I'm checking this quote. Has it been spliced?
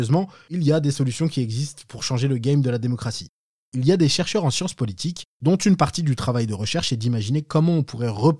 no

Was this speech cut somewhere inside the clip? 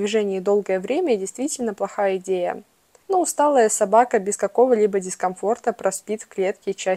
no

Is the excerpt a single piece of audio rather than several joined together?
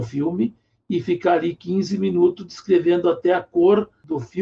yes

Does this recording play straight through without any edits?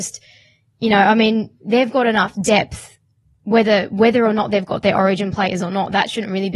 yes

